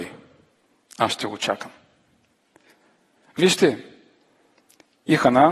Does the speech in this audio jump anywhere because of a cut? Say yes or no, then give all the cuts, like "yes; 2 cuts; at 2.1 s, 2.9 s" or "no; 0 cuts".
no; 0 cuts